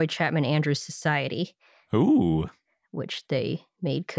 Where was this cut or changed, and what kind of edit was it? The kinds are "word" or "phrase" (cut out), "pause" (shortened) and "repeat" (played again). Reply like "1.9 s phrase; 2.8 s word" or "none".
none